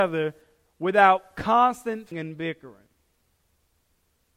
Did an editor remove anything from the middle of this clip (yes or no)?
yes